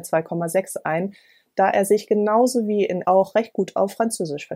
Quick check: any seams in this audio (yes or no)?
yes